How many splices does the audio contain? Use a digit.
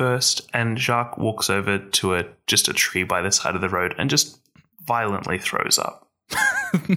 0